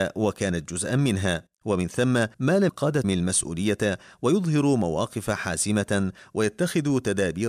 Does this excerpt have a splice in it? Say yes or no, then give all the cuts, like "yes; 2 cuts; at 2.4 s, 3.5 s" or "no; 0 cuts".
yes; 3 cuts; at 2.3 s, 2.7 s, 3.0 s